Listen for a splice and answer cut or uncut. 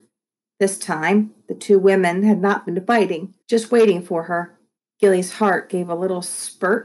cut